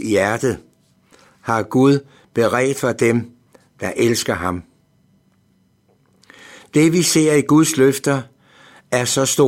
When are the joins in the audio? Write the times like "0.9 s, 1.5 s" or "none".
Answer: none